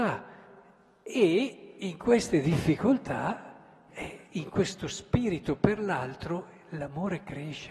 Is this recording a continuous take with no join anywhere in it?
yes; 0 cuts

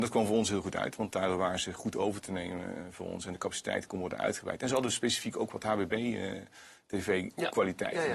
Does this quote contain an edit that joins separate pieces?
no; 0 cuts

